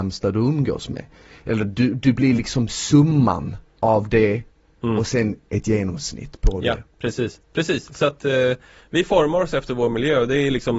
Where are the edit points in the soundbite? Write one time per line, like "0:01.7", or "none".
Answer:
none